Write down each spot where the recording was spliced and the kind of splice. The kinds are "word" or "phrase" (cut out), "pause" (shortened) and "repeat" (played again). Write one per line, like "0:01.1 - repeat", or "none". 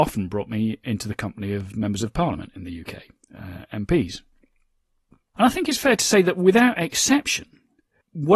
none